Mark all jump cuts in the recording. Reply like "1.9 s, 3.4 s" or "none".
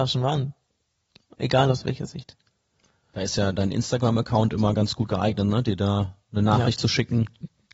none